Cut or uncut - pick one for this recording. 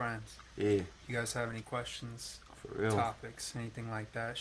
cut